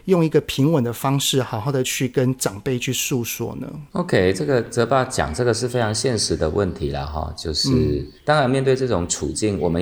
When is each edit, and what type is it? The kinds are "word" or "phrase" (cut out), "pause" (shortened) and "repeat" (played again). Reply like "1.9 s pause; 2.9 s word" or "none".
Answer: 3.9 s pause; 8.2 s pause